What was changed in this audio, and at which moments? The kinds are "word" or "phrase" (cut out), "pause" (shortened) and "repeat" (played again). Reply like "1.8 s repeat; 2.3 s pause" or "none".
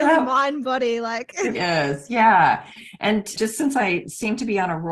1.5 s word; 3.4 s word